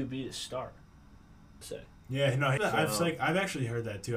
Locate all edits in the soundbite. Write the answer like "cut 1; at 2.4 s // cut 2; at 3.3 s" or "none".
cut 1; at 1.6 s // cut 2; at 2.6 s